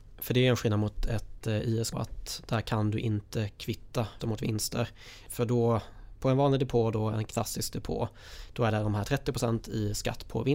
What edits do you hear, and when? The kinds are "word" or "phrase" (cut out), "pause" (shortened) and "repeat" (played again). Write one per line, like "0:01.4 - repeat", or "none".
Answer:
0:01.9 - word
0:04.2 - word